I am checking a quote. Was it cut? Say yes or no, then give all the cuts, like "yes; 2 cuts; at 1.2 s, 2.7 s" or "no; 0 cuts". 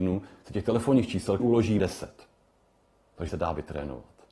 yes; 3 cuts; at 1.4 s, 1.8 s, 3.3 s